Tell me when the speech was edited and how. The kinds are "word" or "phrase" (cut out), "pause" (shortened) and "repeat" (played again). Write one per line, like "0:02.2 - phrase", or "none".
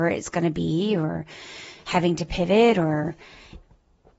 none